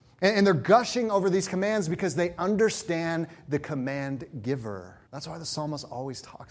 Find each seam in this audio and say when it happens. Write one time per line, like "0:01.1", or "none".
0:05.1